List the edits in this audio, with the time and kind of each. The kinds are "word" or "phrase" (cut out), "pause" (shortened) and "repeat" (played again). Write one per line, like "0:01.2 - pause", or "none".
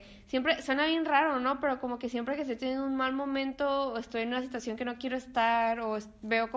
none